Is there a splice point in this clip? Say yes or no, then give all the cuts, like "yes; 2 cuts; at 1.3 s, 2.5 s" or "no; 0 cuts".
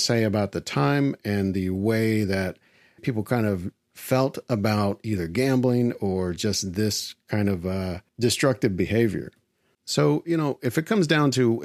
yes; 2 cuts; at 3.0 s, 8.1 s